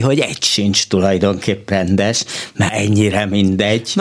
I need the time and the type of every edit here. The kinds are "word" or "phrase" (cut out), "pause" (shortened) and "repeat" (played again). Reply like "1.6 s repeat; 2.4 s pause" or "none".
1.7 s word; 2.7 s word